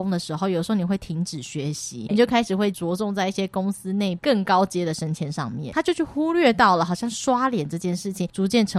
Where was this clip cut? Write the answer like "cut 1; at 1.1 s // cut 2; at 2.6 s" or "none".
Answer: cut 1; at 2.1 s